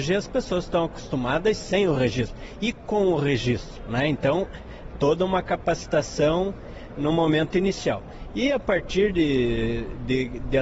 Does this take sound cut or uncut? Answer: uncut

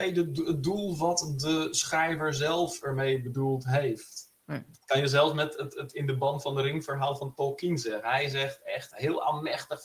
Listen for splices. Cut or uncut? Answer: cut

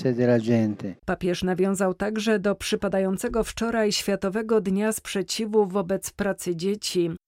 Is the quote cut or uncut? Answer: cut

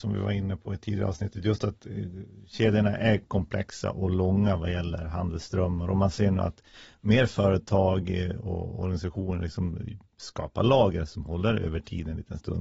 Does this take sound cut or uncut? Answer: uncut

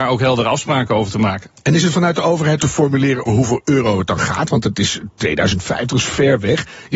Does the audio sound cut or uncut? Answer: cut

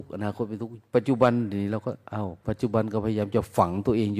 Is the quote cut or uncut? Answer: cut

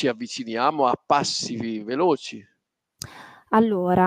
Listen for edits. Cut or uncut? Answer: uncut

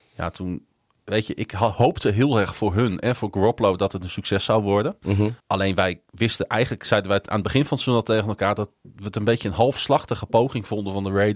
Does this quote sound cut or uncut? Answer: cut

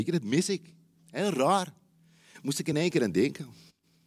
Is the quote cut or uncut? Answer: uncut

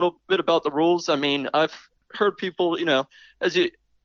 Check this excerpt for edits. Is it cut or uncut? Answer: uncut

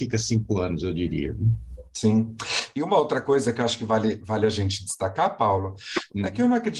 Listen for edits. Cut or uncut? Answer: uncut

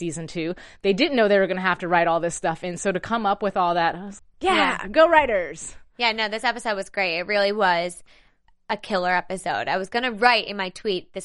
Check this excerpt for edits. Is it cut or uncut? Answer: cut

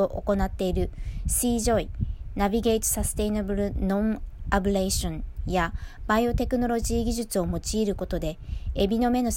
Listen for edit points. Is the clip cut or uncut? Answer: uncut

